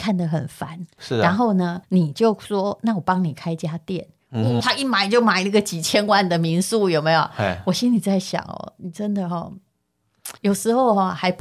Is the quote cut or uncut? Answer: cut